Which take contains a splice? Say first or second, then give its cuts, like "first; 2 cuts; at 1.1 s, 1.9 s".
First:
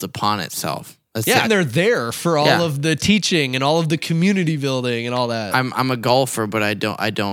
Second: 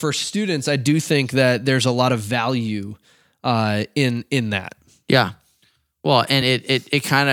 first; 1 cut; at 1.4 s